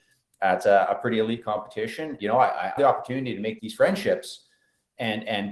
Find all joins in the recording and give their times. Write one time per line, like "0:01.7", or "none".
0:02.2
0:02.8
0:03.6